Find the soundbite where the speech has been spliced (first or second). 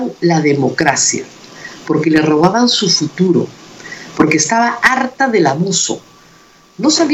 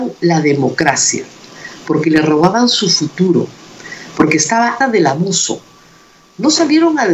second